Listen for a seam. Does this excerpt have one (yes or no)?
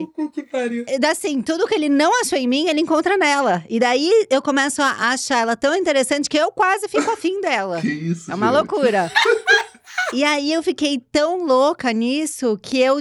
no